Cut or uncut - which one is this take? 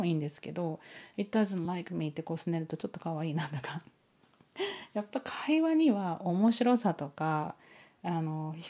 uncut